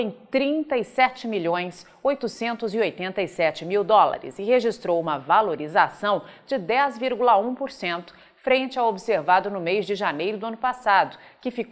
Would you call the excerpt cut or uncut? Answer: uncut